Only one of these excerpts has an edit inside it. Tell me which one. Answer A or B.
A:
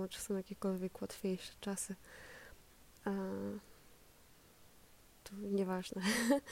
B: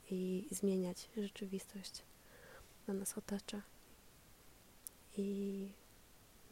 B